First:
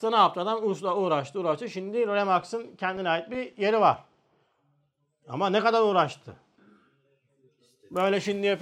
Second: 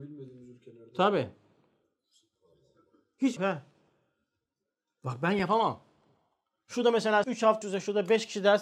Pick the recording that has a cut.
second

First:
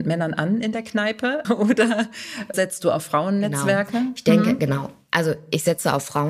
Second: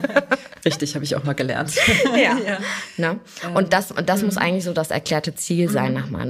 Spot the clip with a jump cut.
first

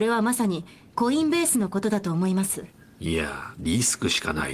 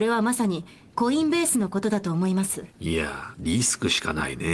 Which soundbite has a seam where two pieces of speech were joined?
second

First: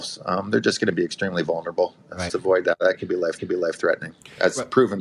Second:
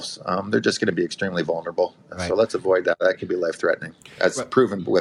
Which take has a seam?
first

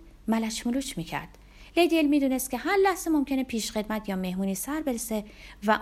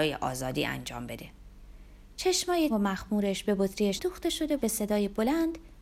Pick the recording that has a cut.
second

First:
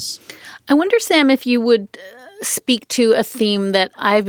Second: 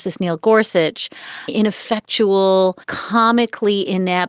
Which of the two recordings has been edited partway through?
second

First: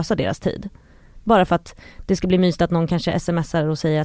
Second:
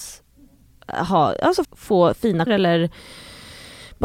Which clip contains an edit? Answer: second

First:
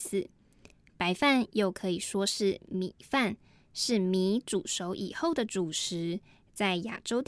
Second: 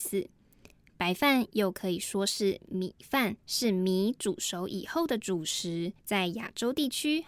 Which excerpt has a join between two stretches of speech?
second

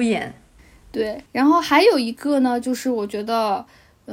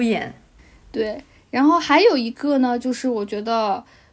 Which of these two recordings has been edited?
first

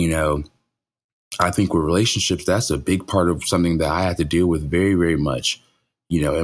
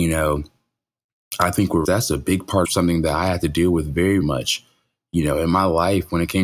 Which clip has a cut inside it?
second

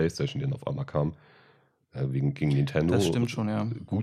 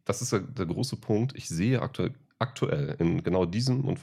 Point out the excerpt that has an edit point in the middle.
second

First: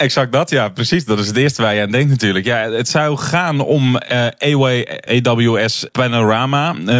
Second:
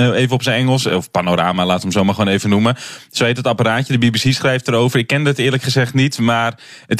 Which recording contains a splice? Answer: first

